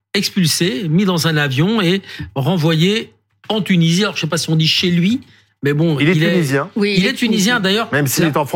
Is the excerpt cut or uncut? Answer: uncut